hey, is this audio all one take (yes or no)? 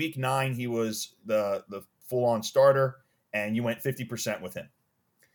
yes